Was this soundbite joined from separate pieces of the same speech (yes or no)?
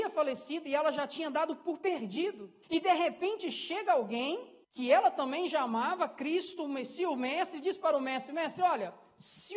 yes